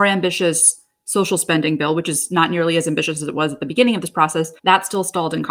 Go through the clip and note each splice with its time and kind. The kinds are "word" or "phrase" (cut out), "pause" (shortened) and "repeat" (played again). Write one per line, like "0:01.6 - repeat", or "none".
0:04.6 - pause